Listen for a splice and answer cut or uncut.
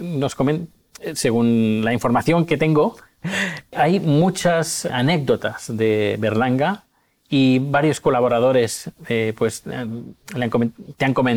uncut